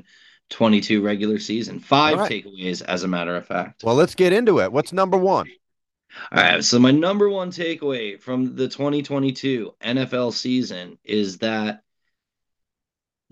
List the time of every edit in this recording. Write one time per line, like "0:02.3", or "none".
none